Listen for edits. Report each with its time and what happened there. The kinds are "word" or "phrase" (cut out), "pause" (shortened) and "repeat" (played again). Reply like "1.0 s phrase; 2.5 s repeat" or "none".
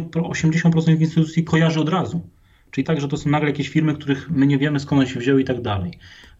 2.8 s phrase

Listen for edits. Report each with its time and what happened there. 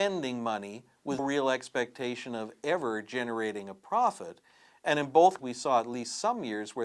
1.2 s word; 5.4 s word

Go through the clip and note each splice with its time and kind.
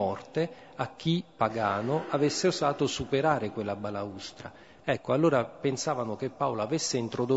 none

